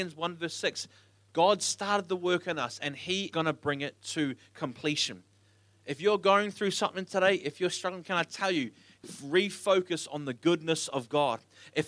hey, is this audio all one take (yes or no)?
no